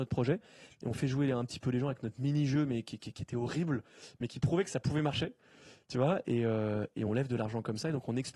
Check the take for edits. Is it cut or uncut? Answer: uncut